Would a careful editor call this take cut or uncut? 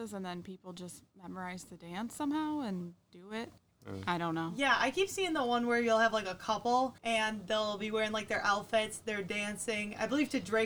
cut